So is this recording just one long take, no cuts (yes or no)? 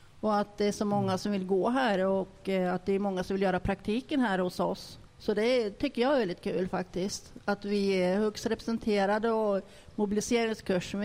no